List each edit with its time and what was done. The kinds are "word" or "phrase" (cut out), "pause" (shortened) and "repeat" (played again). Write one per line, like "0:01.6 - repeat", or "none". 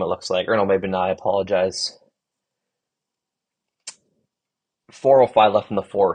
none